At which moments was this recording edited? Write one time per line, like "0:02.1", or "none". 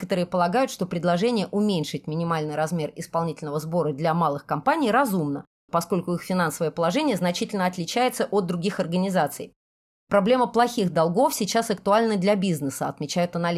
none